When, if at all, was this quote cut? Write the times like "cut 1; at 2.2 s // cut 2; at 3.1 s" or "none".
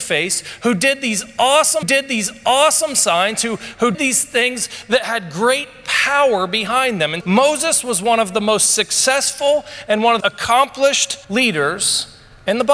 cut 1; at 1.8 s // cut 2; at 3.9 s // cut 3; at 7.2 s // cut 4; at 10.2 s // cut 5; at 11.2 s